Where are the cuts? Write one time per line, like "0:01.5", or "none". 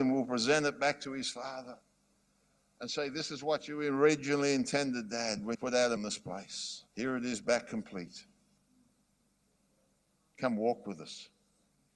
0:05.5
0:06.0
0:06.9